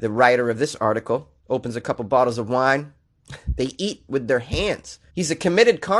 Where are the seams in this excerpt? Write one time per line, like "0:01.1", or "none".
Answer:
0:01.4
0:05.1